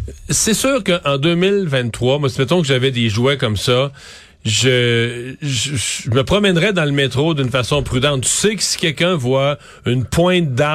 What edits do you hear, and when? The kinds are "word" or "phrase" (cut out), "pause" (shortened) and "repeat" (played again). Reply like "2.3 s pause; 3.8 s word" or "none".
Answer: none